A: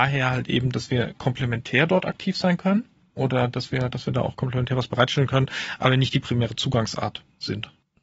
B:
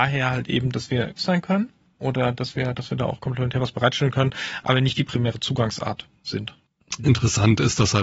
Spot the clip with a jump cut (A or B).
B